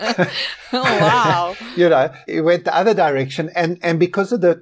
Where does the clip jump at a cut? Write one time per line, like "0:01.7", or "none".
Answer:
0:02.3